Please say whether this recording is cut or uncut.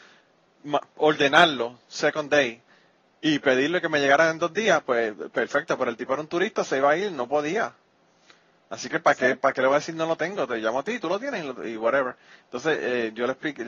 uncut